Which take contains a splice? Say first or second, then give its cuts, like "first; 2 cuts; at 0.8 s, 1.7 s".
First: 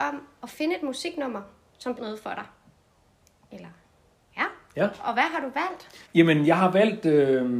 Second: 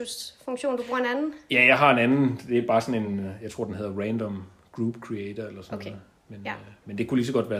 first; 2 cuts; at 2.0 s, 6.0 s